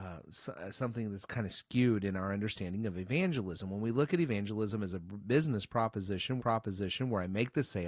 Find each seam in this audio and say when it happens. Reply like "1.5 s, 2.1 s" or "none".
6.4 s